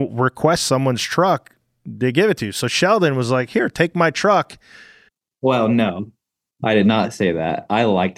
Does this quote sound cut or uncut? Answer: uncut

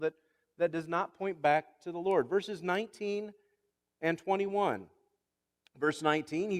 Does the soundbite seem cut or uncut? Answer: uncut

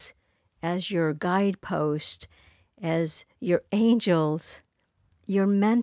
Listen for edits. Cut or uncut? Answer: uncut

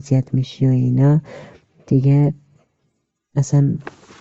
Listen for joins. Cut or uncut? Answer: uncut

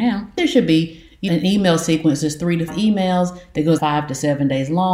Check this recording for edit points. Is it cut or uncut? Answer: cut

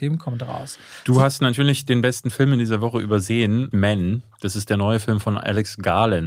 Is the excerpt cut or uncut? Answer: cut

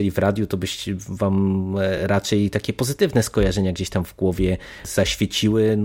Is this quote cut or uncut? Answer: uncut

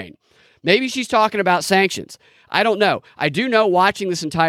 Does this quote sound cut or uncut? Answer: uncut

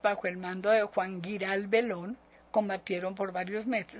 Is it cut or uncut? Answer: uncut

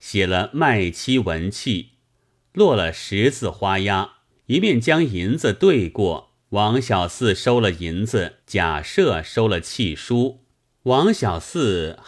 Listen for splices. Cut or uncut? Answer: cut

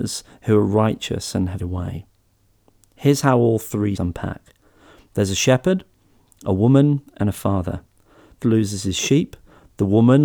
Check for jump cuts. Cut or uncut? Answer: cut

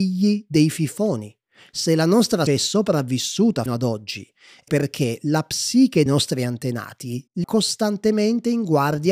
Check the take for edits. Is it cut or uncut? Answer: cut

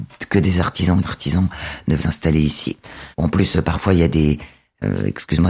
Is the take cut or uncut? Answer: cut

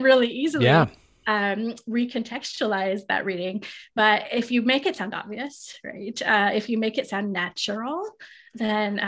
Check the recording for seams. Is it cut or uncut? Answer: uncut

